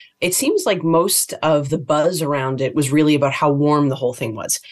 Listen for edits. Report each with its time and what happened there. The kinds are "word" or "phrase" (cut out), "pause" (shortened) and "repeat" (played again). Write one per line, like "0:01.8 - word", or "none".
none